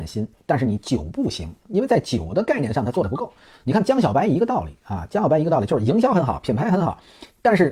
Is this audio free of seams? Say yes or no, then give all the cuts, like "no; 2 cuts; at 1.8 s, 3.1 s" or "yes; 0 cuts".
yes; 0 cuts